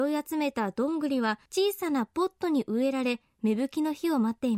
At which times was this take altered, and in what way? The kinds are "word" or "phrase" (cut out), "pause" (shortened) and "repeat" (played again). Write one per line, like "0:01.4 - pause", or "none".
0:01.5 - pause